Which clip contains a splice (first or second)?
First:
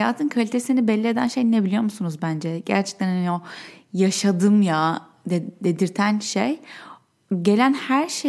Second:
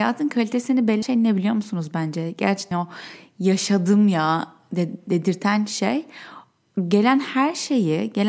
second